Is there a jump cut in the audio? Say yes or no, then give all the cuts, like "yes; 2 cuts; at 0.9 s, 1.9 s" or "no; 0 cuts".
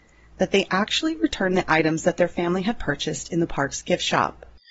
no; 0 cuts